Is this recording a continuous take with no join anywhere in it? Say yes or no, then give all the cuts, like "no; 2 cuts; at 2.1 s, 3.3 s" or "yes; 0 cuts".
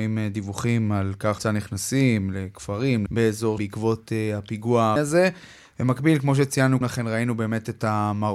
no; 5 cuts; at 1.4 s, 3.1 s, 3.6 s, 5.0 s, 6.8 s